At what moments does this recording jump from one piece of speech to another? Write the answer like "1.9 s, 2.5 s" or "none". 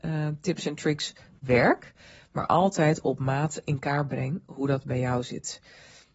none